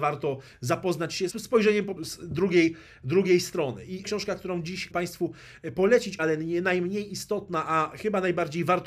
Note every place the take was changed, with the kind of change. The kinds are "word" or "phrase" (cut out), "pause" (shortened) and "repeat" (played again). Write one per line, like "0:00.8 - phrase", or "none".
0:01.3 - word
0:02.0 - word
0:04.0 - word
0:04.9 - word
0:06.2 - word